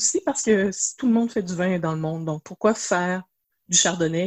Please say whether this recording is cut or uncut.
uncut